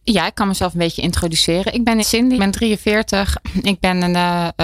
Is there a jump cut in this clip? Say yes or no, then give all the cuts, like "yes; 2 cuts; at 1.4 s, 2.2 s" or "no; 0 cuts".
yes; 2 cuts; at 2.0 s, 2.4 s